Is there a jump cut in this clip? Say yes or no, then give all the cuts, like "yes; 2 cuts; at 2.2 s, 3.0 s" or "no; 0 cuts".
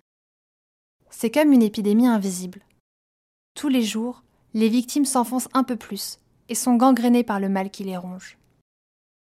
no; 0 cuts